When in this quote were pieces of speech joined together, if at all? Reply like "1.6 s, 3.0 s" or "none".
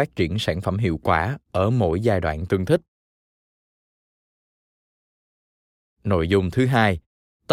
none